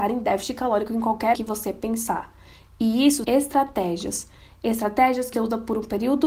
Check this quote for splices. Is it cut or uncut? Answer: cut